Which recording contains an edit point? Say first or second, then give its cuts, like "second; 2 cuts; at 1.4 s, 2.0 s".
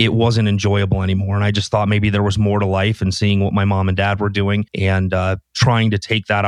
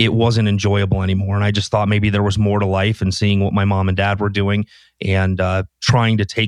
first; 1 cut; at 4.7 s